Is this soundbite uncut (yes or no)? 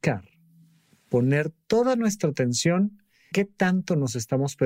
no